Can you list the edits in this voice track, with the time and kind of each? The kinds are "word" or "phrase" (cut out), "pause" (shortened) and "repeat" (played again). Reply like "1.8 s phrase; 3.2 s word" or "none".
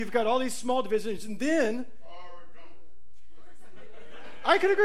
none